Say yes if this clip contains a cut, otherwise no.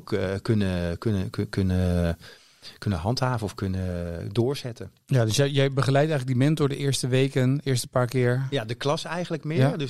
no